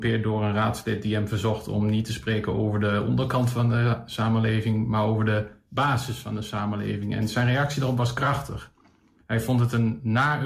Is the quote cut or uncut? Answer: uncut